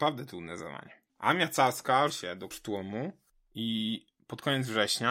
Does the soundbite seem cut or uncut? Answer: cut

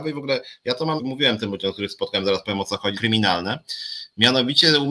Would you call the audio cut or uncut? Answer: cut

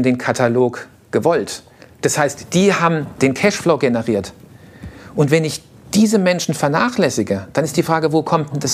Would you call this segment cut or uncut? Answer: uncut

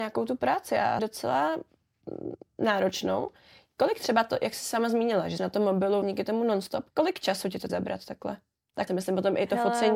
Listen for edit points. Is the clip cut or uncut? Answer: cut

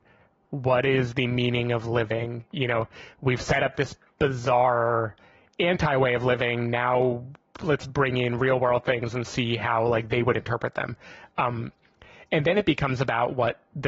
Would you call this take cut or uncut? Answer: uncut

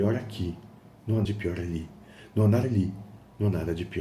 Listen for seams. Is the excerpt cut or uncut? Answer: cut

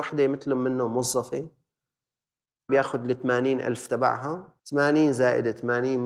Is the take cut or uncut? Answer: cut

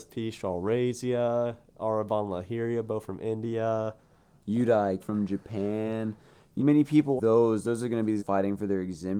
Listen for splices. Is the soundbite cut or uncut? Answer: cut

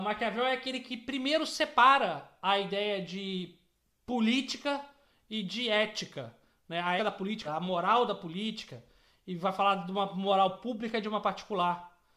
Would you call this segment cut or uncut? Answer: cut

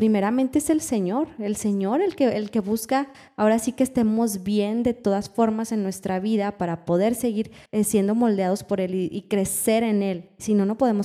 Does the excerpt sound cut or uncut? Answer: cut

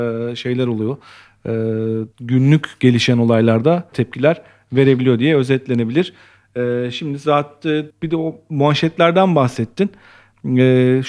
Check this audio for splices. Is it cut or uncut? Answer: cut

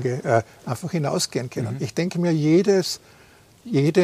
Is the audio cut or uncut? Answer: uncut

